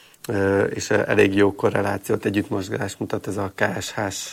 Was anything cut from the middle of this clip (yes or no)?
no